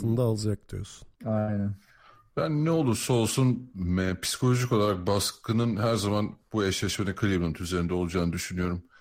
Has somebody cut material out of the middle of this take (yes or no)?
yes